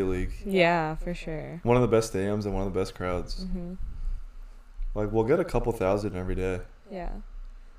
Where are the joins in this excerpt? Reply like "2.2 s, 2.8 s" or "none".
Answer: none